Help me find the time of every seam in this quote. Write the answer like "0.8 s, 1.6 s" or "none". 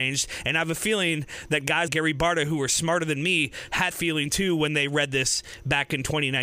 1.9 s, 3.9 s